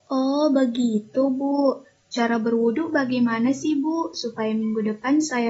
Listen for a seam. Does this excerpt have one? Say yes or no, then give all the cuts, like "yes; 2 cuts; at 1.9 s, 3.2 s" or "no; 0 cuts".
no; 0 cuts